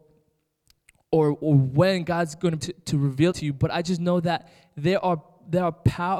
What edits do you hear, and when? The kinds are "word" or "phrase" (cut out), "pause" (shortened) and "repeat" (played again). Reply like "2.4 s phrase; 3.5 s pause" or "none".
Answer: 2.6 s word; 3.3 s word

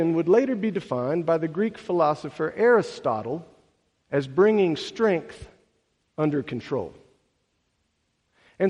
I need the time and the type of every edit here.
none

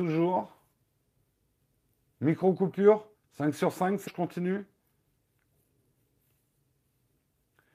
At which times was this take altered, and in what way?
3.1 s pause; 4.1 s word

